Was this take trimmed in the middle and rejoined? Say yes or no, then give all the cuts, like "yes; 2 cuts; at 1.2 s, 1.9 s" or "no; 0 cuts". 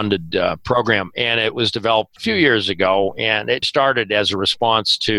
yes; 2 cuts; at 2.2 s, 3.6 s